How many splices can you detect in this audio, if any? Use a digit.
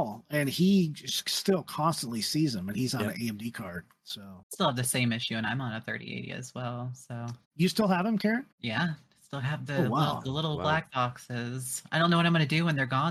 3